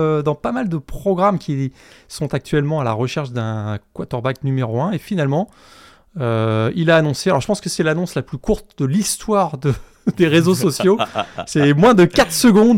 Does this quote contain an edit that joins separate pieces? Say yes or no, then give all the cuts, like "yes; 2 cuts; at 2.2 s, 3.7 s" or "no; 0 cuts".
no; 0 cuts